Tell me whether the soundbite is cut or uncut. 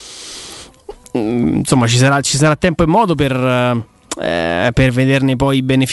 uncut